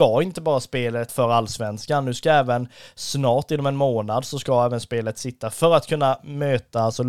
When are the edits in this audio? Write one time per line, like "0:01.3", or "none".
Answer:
0:01.1